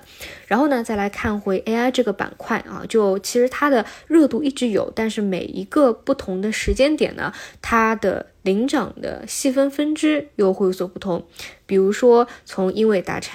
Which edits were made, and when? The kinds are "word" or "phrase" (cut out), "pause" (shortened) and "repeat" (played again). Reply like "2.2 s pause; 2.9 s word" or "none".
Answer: none